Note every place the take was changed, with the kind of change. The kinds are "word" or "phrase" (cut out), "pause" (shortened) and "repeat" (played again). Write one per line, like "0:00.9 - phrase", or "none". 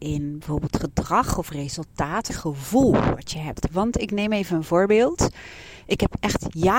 0:02.3 - phrase